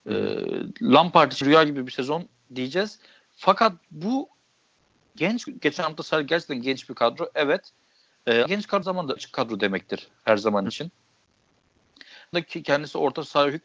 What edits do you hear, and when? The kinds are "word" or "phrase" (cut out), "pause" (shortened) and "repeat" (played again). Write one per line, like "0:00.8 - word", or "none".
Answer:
0:01.4 - word
0:05.5 - word
0:08.5 - word
0:08.8 - word
0:09.2 - word
0:12.3 - word

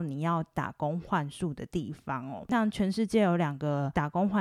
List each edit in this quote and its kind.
none

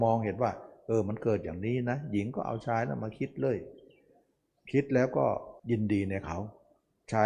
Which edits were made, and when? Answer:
0:05.6 - pause

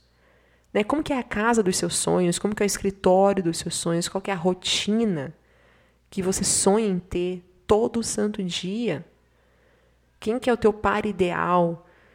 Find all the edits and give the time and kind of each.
none

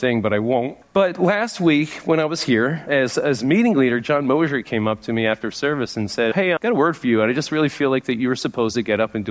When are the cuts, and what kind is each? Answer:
none

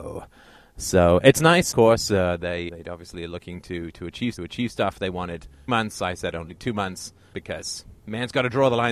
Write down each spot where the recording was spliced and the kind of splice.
0:01.7 - word
0:02.7 - word
0:04.4 - repeat
0:05.7 - word
0:07.3 - word

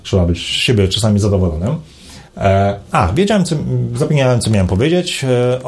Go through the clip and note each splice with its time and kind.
0:02.3 - pause

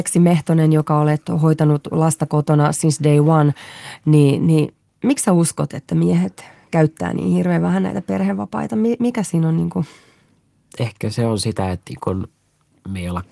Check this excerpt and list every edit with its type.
none

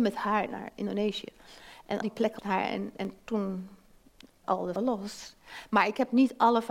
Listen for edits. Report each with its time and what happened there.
0:02.0 - word
0:02.4 - word
0:04.4 - word
0:04.8 - word

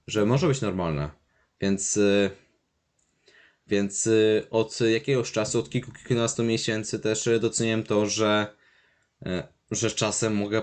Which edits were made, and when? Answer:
none

